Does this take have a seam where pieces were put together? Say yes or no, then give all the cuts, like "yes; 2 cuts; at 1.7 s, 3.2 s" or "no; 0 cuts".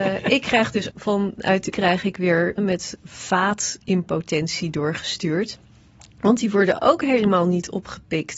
yes; 4 cuts; at 0.9 s, 1.7 s, 2.6 s, 3.0 s